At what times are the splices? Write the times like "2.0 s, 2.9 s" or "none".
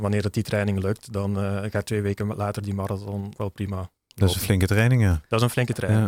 3.3 s